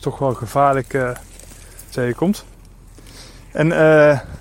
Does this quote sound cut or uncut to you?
cut